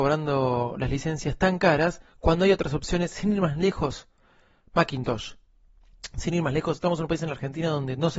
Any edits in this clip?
yes; 1 cut; at 2.1 s

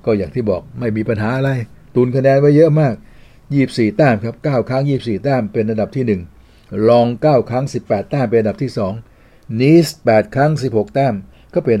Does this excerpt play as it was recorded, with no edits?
yes; 0 cuts

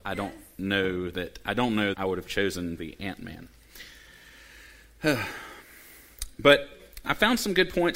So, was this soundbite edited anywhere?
yes; 3 cuts; at 1.9 s, 2.8 s, 7.0 s

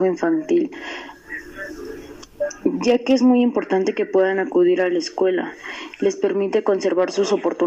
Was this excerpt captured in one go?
yes; 0 cuts

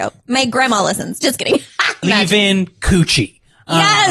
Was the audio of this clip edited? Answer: yes; 1 cut; at 2.0 s

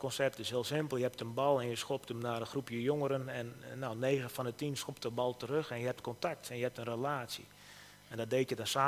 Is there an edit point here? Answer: no; 0 cuts

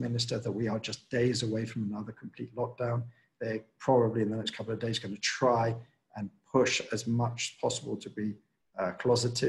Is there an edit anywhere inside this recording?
no; 0 cuts

